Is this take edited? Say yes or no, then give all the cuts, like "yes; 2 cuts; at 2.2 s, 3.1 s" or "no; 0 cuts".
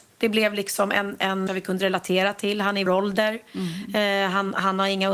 yes; 2 cuts; at 1.5 s, 2.9 s